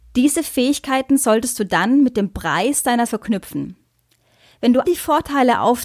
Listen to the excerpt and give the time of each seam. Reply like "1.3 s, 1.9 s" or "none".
3.1 s, 4.8 s

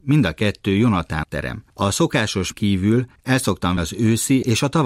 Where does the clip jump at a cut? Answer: 1.2 s, 2.5 s, 3.8 s

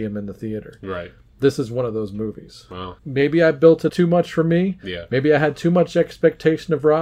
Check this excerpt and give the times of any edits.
3.0 s, 3.9 s

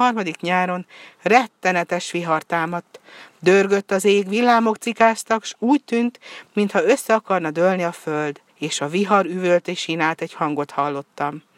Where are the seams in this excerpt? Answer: 8.5 s

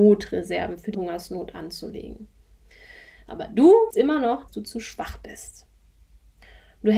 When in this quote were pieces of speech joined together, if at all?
0.9 s, 3.9 s, 4.5 s

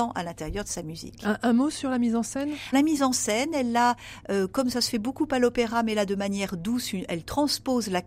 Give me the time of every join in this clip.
2.7 s

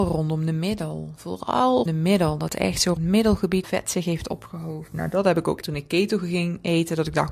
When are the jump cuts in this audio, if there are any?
1.9 s, 3.0 s, 3.6 s, 5.6 s

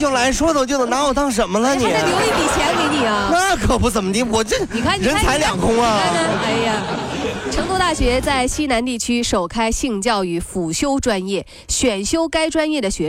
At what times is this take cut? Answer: none

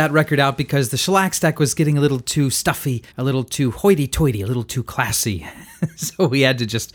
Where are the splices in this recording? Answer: 3.1 s

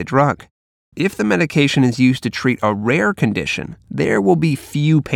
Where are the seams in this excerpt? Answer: none

